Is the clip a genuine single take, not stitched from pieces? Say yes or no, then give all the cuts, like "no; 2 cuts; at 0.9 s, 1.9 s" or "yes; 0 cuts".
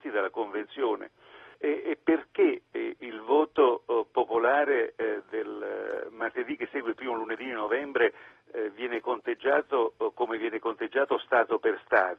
no; 1 cut; at 1.5 s